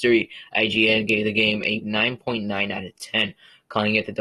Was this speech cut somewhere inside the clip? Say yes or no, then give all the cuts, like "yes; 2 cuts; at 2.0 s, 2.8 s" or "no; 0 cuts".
no; 0 cuts